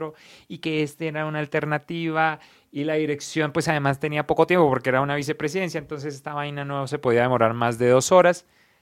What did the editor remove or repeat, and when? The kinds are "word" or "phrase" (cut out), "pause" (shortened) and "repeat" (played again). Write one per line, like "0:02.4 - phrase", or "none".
none